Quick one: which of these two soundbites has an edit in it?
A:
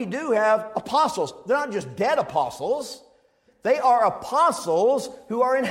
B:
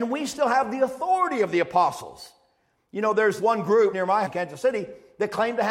B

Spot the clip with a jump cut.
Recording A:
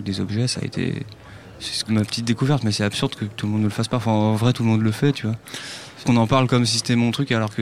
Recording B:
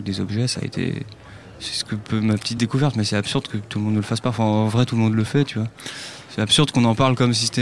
A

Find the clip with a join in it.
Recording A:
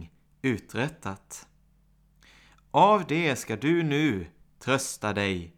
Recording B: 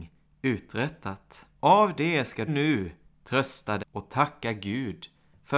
B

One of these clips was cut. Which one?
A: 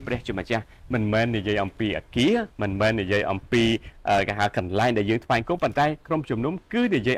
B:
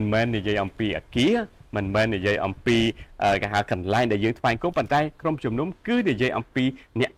A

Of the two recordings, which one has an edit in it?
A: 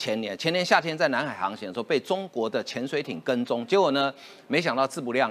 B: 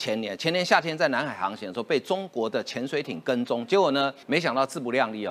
B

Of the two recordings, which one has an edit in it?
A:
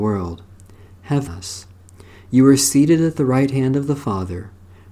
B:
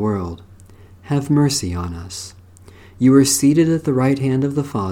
A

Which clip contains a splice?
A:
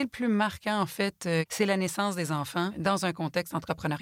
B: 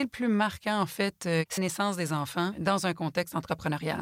B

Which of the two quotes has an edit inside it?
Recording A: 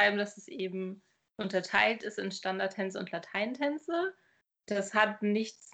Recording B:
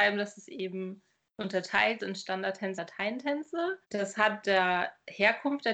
B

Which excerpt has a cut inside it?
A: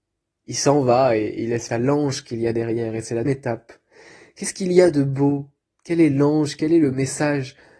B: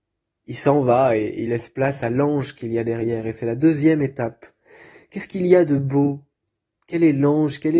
A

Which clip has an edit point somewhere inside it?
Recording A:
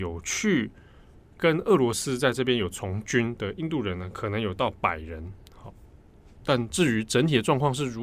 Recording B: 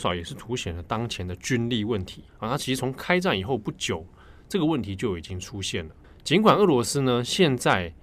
B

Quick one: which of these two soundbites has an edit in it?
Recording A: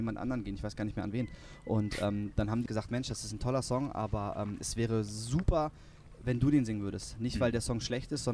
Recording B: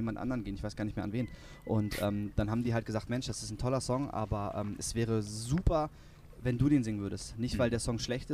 A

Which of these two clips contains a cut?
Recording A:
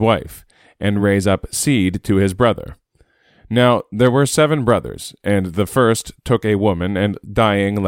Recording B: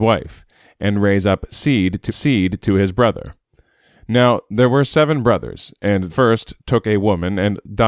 B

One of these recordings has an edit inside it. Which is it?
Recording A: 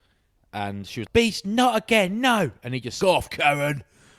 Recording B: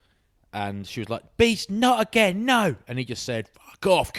A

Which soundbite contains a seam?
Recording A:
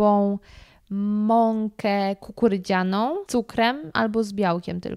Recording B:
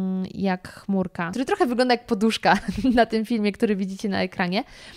A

